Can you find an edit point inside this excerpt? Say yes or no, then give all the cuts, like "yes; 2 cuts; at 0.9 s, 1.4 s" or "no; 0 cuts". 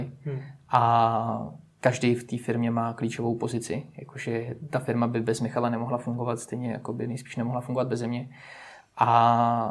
no; 0 cuts